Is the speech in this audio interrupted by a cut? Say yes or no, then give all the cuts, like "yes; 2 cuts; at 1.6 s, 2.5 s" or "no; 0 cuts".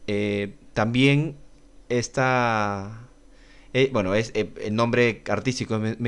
no; 0 cuts